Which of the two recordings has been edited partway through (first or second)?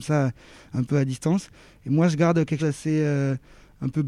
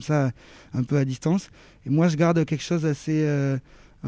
first